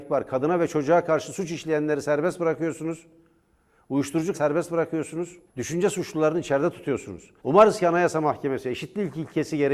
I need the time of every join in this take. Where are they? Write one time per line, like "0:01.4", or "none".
0:04.3
0:05.5
0:07.4